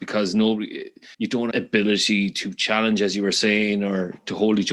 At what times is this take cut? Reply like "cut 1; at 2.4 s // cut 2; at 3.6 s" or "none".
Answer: cut 1; at 1.1 s // cut 2; at 1.5 s